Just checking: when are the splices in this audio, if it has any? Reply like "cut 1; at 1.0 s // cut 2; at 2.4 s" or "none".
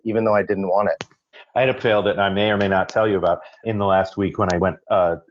cut 1; at 1.8 s // cut 2; at 3.6 s